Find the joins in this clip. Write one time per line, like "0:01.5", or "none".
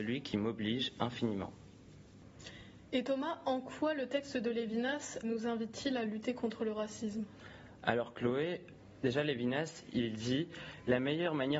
0:05.2